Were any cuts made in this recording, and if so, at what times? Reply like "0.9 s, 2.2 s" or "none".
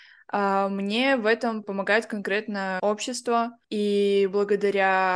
1.6 s, 3.6 s